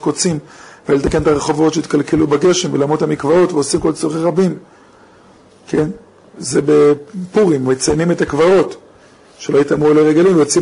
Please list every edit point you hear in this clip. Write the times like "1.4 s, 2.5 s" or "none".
none